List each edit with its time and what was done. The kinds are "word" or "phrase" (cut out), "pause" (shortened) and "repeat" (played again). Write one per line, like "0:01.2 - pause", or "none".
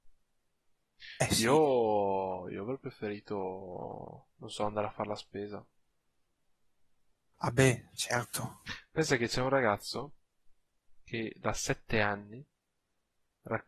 0:04.3 - pause